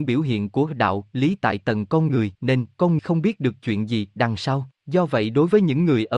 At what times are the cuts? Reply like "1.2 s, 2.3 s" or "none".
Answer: 2.3 s, 3.0 s, 4.8 s